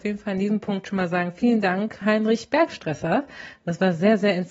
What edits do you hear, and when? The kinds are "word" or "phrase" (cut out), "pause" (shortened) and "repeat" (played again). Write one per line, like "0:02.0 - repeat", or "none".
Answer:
0:02.0 - word